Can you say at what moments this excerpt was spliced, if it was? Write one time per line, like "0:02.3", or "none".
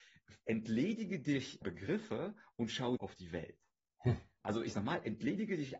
0:01.6
0:03.0
0:04.7

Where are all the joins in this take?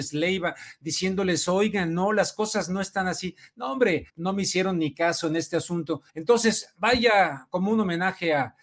0:04.1
0:06.1

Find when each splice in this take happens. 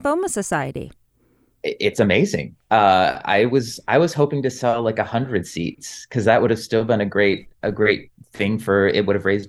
none

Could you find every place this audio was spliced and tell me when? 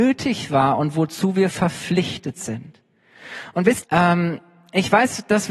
0:03.8

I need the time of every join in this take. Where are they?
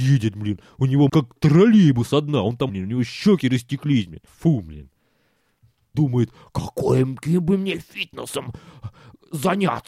0:01.1
0:02.7
0:04.3
0:05.9

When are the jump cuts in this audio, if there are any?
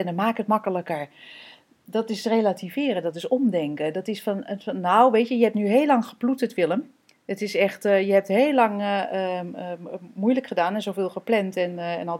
none

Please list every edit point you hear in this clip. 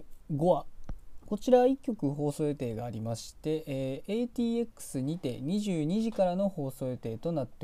none

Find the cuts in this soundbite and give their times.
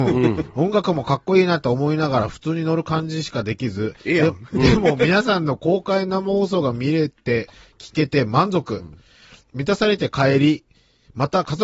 none

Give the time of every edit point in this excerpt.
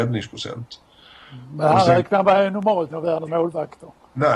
0:02.9
0:03.3

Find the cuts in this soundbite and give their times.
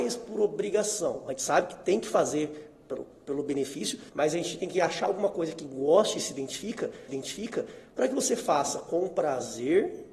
0:04.1
0:07.1

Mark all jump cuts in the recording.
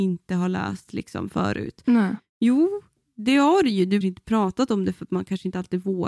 0:04.0

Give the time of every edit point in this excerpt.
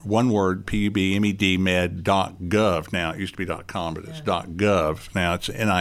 none

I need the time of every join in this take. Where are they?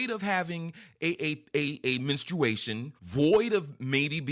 0:03.0

